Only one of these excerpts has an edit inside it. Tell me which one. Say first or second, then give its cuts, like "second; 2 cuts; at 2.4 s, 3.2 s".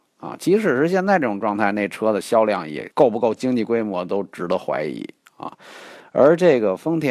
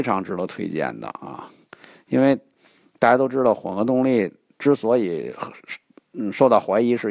first; 1 cut; at 2.9 s